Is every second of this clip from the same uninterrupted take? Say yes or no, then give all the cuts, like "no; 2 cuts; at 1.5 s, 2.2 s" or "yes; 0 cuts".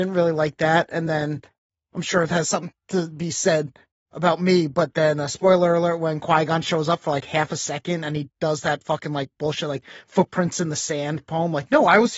yes; 0 cuts